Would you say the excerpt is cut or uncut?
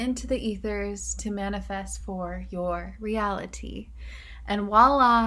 uncut